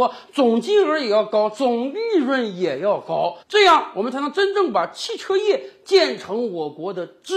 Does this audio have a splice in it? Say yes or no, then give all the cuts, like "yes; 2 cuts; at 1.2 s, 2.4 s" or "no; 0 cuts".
yes; 1 cut; at 3.4 s